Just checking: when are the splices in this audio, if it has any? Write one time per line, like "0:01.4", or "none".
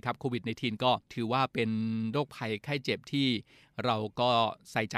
0:01.0